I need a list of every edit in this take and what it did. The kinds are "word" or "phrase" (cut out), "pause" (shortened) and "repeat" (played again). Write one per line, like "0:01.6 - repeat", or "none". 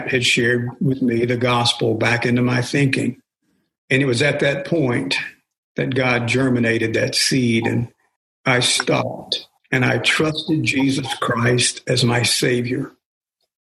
0:09.6 - pause